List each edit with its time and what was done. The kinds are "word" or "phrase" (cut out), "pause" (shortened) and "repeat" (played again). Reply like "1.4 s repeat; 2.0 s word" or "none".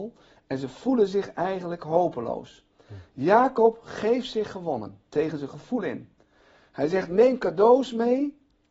none

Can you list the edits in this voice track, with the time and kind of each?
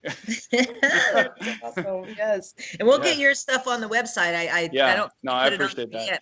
none

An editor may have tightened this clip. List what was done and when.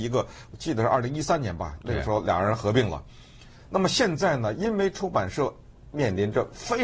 none

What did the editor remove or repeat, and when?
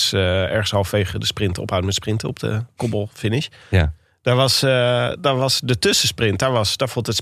none

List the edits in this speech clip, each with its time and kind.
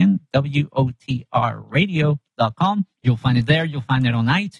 2.9 s pause

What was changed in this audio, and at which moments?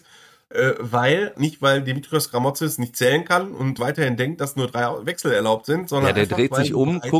1.3 s word; 3.8 s word

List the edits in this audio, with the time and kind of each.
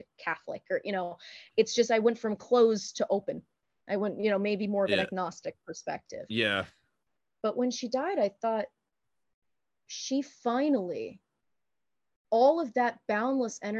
none

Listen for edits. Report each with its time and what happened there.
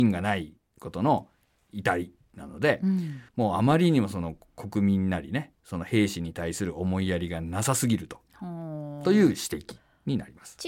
3.3 s pause

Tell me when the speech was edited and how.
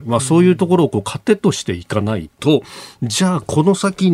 2.3 s pause

